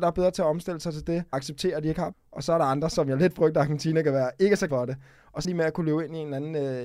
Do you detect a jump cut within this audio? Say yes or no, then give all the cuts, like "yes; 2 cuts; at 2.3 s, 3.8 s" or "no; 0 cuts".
yes; 4 cuts; at 1.3 s, 2.1 s, 4.7 s, 5.4 s